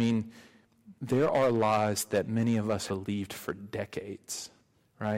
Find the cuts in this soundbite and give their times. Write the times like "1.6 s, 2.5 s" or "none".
1.0 s, 2.9 s